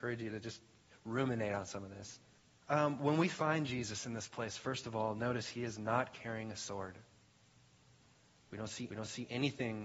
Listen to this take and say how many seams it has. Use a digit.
2